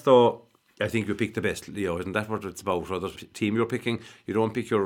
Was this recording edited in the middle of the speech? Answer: yes; 1 cut; at 3.1 s

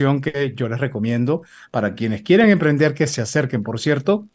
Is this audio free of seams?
yes; 0 cuts

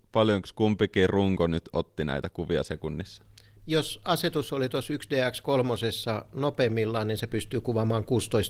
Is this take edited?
no; 0 cuts

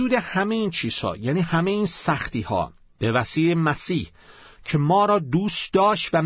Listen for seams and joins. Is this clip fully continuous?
yes; 0 cuts

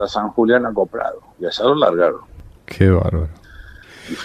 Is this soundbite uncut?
yes; 0 cuts

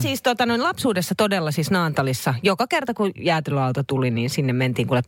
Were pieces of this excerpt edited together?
no; 0 cuts

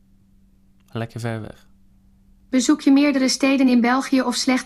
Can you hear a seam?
yes; 1 cut; at 1.9 s

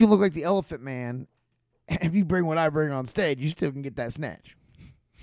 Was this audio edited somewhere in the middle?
no; 0 cuts

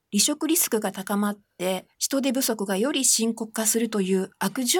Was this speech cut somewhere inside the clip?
yes; 1 cut; at 1.9 s

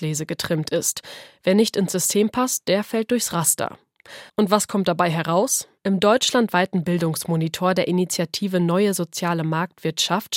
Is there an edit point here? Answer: yes; 1 cut; at 4.3 s

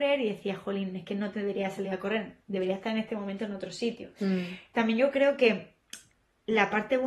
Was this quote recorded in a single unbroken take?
yes; 0 cuts

